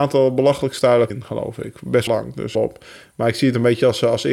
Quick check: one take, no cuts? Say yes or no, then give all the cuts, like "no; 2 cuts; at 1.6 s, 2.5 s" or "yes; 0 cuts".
no; 3 cuts; at 1.1 s, 2.1 s, 2.5 s